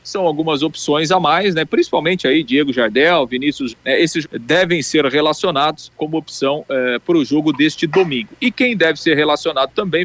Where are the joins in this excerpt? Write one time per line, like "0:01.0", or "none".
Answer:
0:03.7
0:04.2
0:05.9